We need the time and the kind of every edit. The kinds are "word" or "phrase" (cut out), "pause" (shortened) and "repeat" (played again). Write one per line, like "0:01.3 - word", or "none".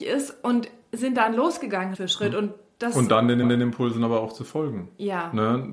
0:01.9 - word
0:03.4 - repeat